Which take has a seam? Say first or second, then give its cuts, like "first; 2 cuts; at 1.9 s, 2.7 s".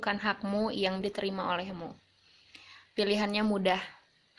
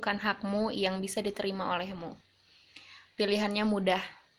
first; 1 cut; at 1.0 s